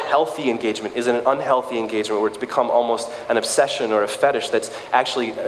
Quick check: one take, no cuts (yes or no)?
yes